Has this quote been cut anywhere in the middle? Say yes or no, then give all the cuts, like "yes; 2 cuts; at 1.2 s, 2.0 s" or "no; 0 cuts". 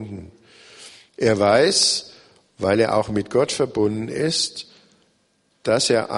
no; 0 cuts